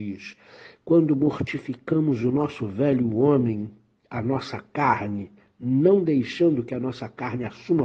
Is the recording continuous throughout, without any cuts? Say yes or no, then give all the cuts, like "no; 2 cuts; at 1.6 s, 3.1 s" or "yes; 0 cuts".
yes; 0 cuts